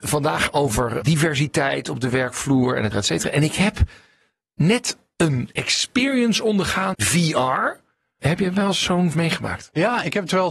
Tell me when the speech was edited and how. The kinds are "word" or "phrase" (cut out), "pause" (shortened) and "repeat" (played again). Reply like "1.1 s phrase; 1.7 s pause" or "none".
2.9 s word; 6.9 s word; 9.1 s word